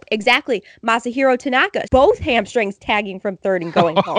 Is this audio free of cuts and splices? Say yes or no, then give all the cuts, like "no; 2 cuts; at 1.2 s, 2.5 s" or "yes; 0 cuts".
no; 1 cut; at 1.9 s